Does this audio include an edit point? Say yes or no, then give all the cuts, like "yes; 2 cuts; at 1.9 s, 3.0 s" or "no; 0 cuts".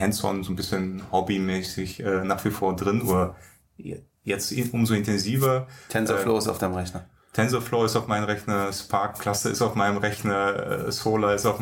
no; 0 cuts